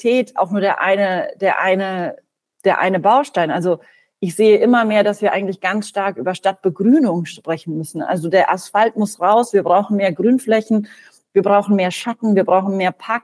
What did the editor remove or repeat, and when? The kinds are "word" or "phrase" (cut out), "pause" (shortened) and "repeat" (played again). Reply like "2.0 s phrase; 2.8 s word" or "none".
none